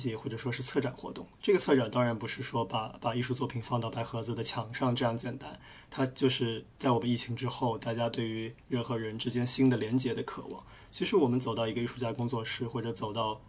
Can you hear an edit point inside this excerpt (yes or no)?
yes